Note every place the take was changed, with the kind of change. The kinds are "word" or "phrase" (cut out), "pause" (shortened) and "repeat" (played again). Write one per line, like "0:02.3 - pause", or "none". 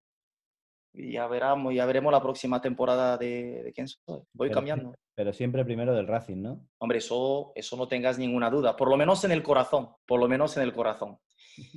0:04.2 - pause
0:06.7 - pause
0:09.9 - pause